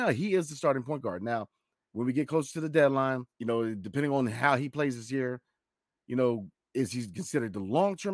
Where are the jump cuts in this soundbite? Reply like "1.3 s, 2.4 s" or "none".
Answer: 3.3 s